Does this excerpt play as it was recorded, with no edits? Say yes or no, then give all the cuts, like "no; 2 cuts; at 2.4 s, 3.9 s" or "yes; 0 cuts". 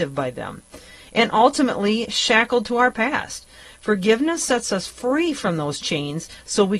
yes; 0 cuts